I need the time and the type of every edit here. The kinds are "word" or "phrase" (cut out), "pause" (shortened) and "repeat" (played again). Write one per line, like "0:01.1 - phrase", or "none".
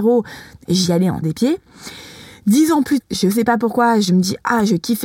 0:01.2 - word
0:03.0 - word